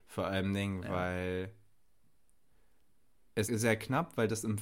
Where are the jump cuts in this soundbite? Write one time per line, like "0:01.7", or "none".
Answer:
0:03.4